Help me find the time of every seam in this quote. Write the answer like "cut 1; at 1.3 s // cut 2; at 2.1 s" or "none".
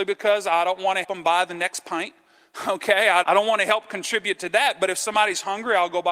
cut 1; at 1.0 s // cut 2; at 3.2 s